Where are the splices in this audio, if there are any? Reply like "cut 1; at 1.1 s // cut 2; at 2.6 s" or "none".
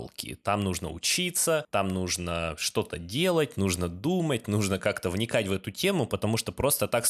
none